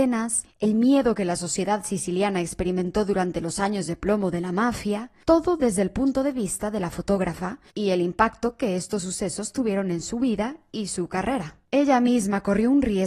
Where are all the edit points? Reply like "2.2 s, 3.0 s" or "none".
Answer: 11.7 s